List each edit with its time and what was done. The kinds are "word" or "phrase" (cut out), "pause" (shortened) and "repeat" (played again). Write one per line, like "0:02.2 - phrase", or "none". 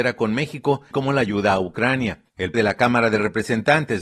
0:00.9 - word
0:02.5 - word